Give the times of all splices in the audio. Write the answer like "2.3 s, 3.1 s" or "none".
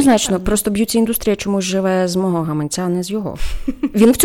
none